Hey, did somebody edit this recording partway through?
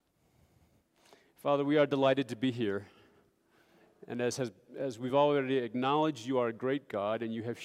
no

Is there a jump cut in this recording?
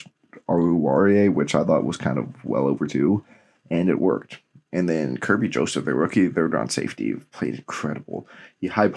no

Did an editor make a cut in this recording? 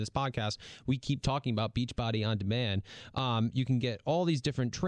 no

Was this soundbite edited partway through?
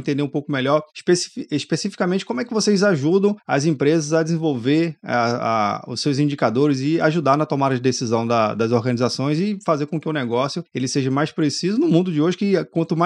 no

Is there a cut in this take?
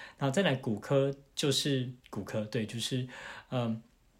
yes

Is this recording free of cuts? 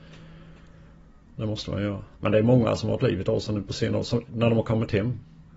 no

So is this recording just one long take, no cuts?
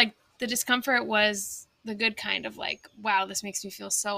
no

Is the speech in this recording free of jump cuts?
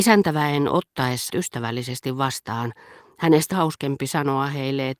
no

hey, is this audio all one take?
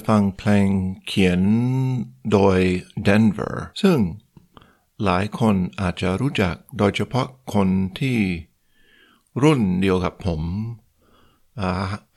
no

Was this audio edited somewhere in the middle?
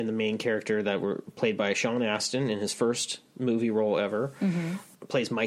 no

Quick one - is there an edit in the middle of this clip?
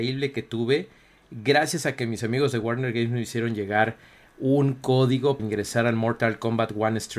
yes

